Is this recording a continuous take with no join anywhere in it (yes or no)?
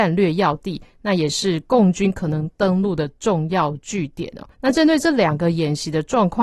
no